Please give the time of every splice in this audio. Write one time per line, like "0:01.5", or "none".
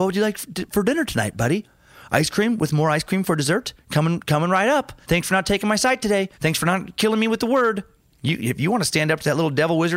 0:05.0
0:06.3
0:08.0